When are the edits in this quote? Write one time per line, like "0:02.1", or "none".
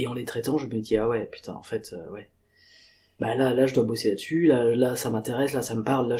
none